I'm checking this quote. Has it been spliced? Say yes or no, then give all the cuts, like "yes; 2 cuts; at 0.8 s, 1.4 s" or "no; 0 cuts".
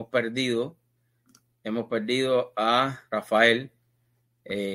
yes; 1 cut; at 3.1 s